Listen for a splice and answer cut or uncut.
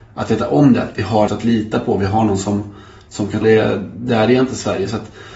cut